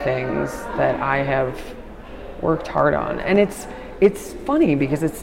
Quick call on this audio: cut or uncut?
uncut